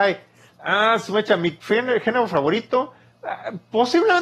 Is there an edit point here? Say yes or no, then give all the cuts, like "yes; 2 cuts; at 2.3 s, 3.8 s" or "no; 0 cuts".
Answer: no; 0 cuts